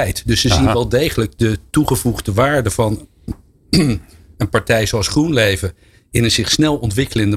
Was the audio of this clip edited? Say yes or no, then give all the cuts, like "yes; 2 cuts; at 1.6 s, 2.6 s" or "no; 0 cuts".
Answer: no; 0 cuts